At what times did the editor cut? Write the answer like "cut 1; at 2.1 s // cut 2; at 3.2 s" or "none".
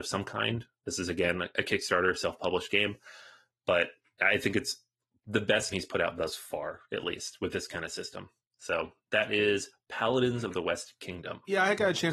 cut 1; at 5.7 s